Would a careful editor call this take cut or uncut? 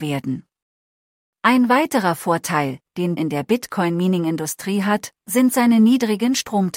cut